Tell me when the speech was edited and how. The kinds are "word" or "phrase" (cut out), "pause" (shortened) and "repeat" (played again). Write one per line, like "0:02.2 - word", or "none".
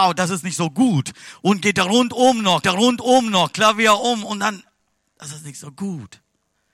0:02.6 - repeat